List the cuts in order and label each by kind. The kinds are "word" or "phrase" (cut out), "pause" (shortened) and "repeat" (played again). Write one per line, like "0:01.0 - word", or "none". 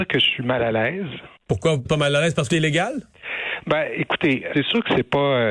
0:01.4 - pause
0:01.9 - word
0:02.5 - phrase
0:04.5 - word